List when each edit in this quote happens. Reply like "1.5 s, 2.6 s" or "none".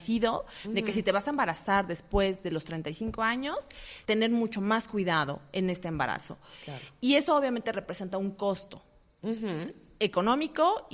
4.1 s